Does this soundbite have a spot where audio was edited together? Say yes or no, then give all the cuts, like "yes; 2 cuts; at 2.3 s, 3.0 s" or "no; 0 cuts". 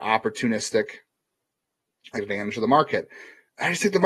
yes; 1 cut; at 2.1 s